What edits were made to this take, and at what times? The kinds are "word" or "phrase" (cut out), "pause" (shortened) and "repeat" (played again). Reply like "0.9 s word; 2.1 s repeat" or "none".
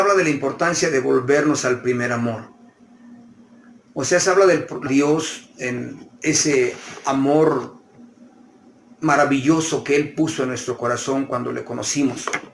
4.9 s phrase